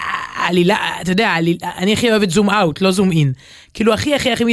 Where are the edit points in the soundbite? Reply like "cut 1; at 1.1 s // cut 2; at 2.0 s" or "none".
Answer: none

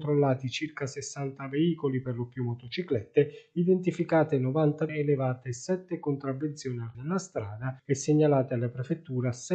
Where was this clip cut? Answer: cut 1; at 4.9 s // cut 2; at 6.9 s // cut 3; at 7.8 s

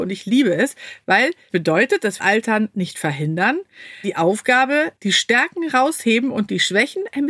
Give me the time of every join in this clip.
cut 1; at 1.5 s // cut 2; at 2.2 s // cut 3; at 4.0 s // cut 4; at 5.0 s

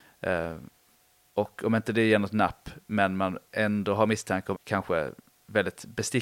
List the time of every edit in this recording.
cut 1; at 4.5 s

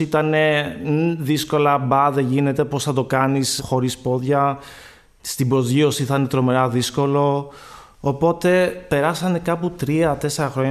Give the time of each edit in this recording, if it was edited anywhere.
none

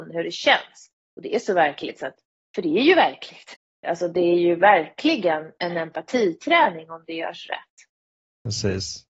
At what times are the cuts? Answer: none

